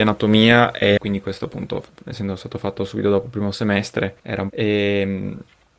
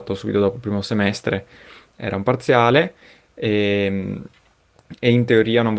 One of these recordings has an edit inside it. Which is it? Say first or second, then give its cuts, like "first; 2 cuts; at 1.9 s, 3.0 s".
first; 3 cuts; at 1.0 s, 4.2 s, 4.5 s